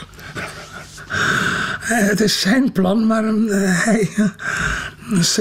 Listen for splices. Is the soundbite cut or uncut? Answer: uncut